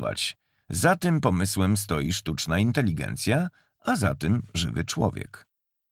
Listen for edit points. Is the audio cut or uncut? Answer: uncut